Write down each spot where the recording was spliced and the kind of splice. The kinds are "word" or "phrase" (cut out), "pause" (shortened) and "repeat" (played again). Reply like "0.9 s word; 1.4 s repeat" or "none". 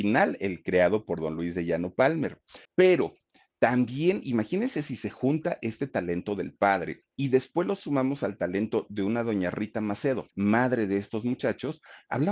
2.6 s pause; 7.1 s pause; 10.3 s pause